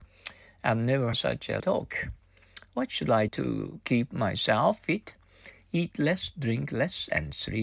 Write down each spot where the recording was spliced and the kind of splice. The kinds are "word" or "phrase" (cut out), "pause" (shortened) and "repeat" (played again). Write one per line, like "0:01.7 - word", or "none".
0:01.1 - word
0:01.6 - word
0:03.3 - word